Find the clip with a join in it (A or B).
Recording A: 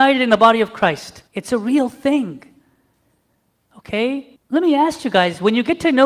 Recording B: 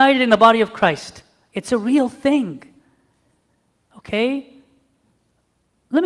A